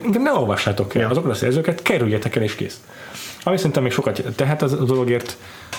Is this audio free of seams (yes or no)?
yes